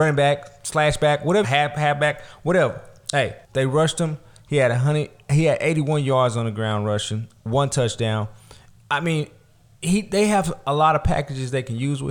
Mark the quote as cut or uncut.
cut